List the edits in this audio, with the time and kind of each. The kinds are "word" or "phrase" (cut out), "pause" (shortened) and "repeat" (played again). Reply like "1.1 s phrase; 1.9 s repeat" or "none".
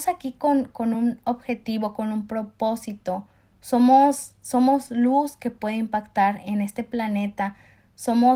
none